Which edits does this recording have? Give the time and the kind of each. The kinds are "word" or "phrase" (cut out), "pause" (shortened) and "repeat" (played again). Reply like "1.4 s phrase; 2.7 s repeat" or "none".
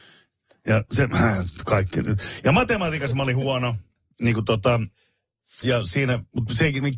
5.6 s word